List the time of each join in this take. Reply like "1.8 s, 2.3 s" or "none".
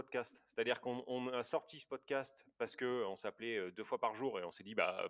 none